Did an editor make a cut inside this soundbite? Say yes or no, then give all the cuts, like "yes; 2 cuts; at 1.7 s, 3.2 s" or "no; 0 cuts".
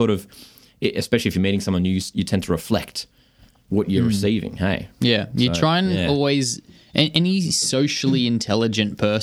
no; 0 cuts